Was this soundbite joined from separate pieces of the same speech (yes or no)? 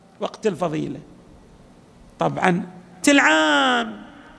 yes